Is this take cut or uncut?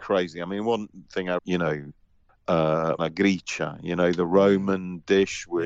cut